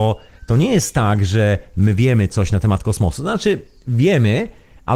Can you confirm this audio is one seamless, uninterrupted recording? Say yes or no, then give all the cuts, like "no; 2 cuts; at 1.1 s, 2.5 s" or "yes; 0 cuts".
yes; 0 cuts